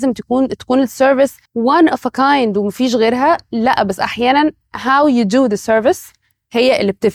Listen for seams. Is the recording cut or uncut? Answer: cut